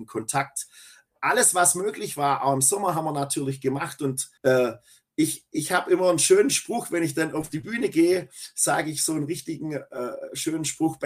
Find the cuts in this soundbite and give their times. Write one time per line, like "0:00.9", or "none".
0:04.4